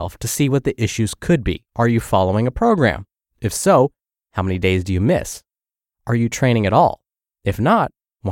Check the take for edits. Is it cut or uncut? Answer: cut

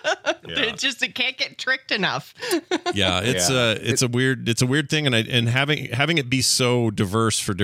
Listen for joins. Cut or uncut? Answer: uncut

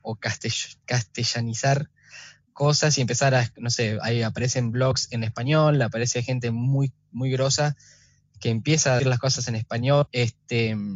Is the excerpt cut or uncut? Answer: cut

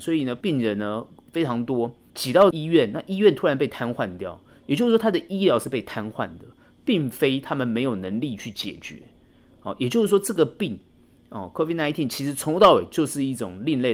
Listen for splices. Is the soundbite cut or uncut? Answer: uncut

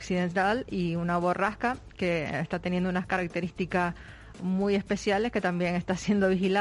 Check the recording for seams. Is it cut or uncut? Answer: uncut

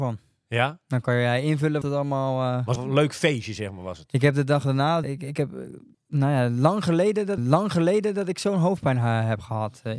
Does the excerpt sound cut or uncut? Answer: cut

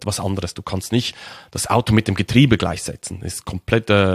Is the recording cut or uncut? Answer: uncut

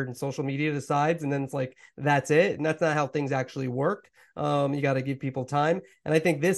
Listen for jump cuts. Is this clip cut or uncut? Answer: uncut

